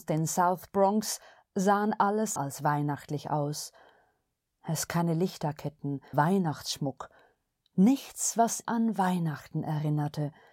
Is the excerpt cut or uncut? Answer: cut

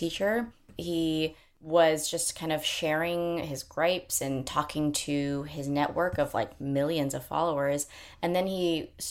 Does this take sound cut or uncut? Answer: uncut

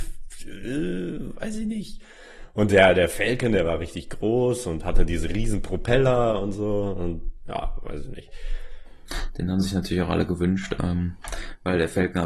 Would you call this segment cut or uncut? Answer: uncut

